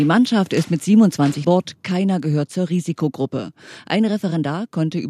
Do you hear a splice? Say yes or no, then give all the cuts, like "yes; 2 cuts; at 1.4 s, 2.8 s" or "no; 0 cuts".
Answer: yes; 1 cut; at 1.4 s